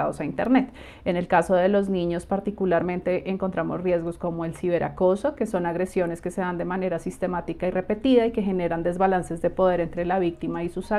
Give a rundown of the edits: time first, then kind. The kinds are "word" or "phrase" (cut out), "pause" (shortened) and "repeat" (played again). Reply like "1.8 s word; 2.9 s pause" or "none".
none